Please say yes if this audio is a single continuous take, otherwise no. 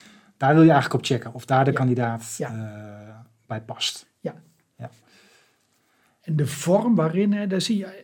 yes